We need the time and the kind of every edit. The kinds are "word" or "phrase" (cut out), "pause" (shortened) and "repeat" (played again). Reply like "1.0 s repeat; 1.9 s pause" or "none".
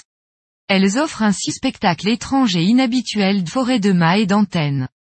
1.5 s word; 3.5 s word